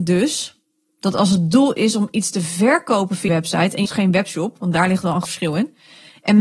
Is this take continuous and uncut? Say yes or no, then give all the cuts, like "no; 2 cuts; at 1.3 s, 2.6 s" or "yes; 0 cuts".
no; 3 cuts; at 3.3 s, 3.8 s, 5.2 s